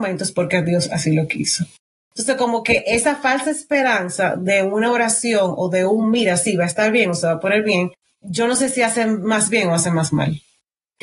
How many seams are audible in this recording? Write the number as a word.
zero